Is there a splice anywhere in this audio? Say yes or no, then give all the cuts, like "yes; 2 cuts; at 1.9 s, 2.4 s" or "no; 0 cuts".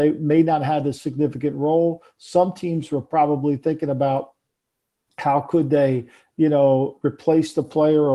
no; 0 cuts